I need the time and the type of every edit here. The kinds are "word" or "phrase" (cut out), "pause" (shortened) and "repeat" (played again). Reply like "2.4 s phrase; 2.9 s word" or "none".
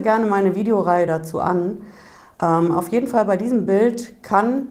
none